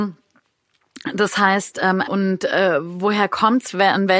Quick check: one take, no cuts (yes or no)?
no